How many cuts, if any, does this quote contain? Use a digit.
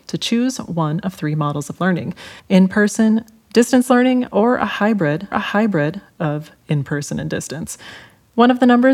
2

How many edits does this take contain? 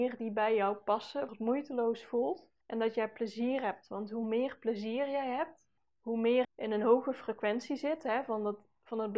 4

